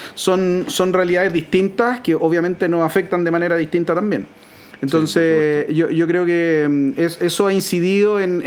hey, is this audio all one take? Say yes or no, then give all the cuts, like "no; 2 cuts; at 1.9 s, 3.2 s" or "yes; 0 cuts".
yes; 0 cuts